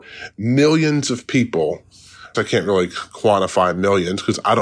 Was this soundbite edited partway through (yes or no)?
yes